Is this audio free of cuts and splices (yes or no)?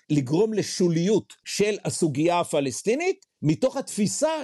no